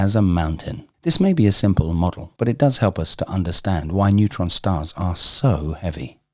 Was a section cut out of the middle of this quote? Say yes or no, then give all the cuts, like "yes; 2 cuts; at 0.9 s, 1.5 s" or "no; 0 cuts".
yes; 2 cuts; at 0.9 s, 2.4 s